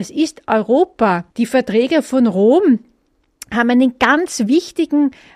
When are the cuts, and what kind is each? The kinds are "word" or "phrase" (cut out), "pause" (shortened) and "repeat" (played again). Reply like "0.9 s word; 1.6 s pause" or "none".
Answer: 1.3 s pause